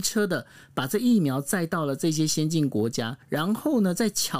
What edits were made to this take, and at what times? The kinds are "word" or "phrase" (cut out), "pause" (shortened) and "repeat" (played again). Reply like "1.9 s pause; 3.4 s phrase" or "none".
3.2 s pause